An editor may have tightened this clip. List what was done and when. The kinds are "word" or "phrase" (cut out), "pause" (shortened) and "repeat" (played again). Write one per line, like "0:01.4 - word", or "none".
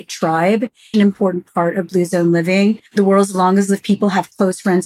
0:00.9 - phrase
0:02.9 - pause

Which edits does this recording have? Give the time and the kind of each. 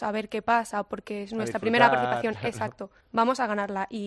0:03.0 - pause

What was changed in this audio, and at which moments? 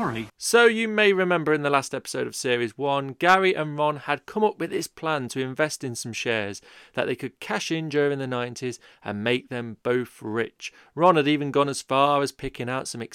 none

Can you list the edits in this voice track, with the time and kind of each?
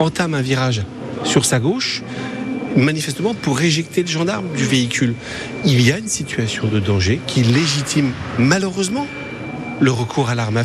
none

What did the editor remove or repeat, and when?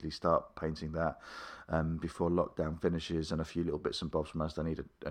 none

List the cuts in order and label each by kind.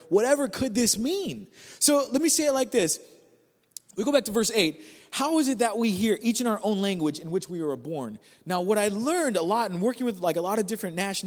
none

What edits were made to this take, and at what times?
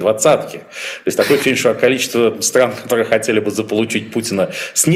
none

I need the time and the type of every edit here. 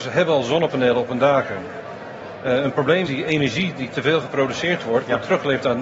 0:03.1 - word

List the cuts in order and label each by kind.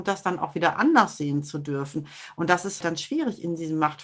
0:02.8 - word

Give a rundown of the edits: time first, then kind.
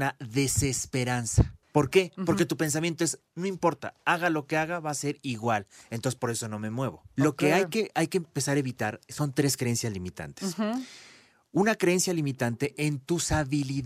none

